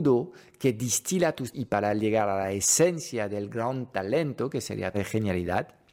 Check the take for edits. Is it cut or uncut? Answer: cut